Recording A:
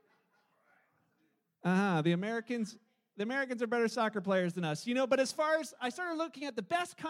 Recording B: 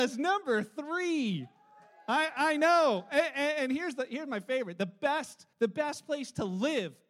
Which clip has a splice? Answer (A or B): B